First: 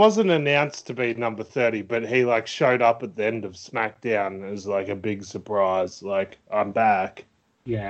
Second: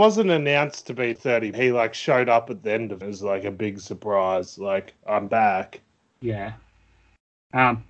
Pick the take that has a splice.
second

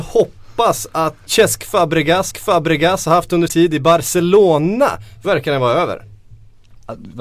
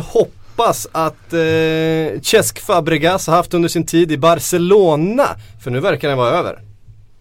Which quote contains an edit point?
first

